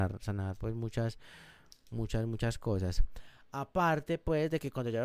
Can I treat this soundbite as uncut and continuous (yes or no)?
yes